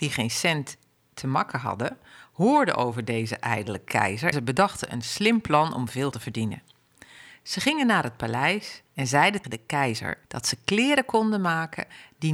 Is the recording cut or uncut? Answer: cut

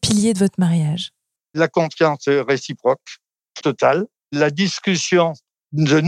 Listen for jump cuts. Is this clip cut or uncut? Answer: cut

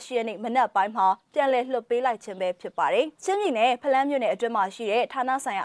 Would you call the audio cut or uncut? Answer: cut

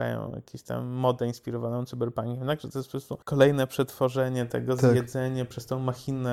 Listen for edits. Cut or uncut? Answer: cut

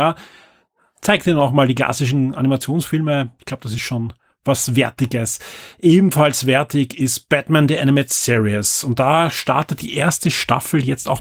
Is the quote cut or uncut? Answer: uncut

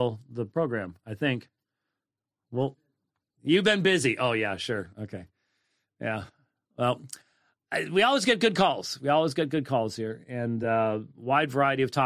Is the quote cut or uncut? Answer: uncut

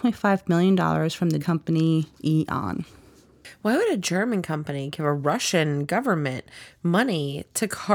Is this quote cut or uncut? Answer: cut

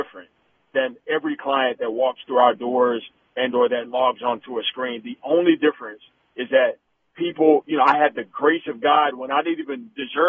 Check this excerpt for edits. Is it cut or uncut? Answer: uncut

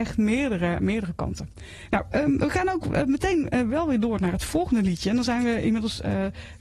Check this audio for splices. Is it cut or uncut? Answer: uncut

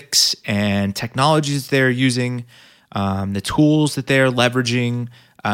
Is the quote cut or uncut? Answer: uncut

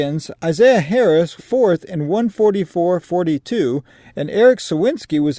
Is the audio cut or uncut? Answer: cut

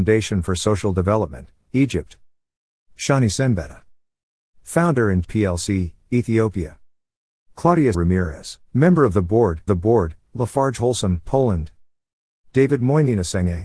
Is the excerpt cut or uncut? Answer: cut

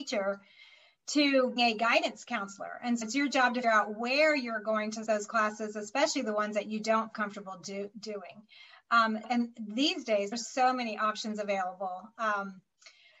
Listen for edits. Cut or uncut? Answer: cut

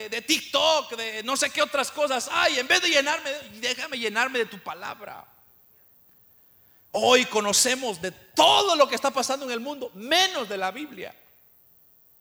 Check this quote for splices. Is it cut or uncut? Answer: uncut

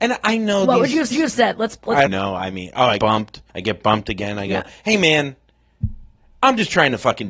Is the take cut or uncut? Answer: cut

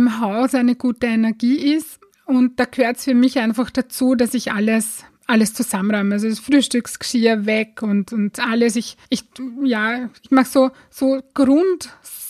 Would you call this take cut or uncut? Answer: cut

